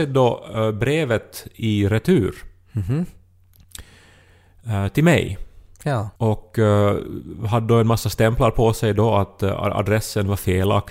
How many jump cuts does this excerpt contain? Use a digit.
1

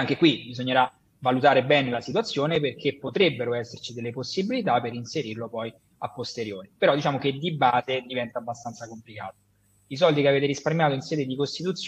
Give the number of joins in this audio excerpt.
0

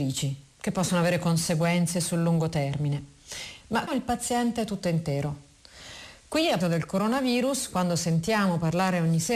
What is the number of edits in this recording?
2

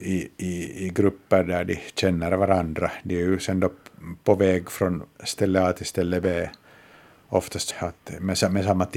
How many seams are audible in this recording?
1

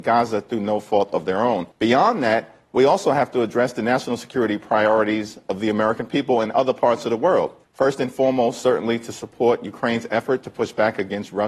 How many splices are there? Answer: 2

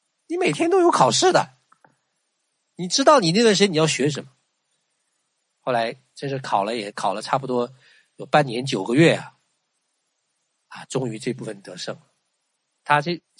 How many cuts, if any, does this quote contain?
0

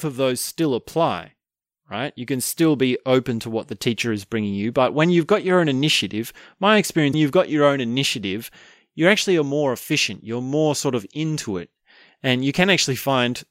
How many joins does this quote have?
1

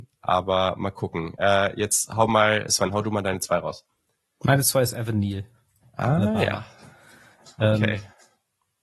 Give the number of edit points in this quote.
0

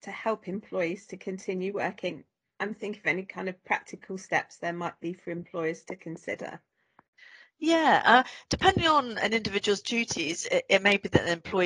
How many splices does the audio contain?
0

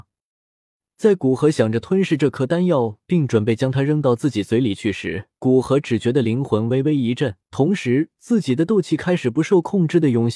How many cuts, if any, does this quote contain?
2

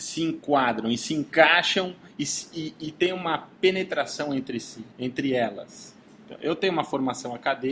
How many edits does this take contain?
1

